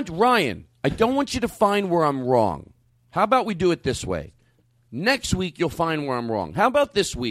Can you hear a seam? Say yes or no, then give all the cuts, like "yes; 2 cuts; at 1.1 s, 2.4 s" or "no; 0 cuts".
no; 0 cuts